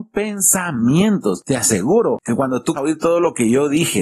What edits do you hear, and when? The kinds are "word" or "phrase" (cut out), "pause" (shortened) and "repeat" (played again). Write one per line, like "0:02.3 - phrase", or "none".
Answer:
0:02.8 - word